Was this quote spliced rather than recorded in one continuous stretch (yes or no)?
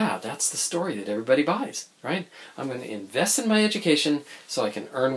yes